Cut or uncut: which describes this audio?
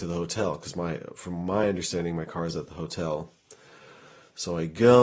uncut